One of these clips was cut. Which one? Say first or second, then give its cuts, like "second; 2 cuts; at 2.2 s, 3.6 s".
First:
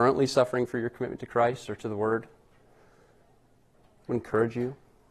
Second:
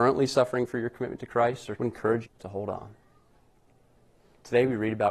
second; 2 cuts; at 1.8 s, 2.2 s